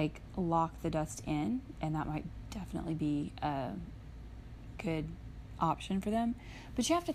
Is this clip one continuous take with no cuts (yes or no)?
yes